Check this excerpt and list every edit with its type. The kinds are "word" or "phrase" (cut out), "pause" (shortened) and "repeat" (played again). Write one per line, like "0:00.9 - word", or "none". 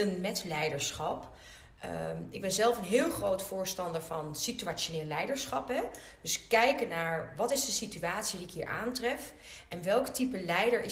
none